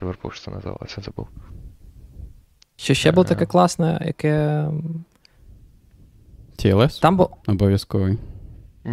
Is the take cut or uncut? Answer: uncut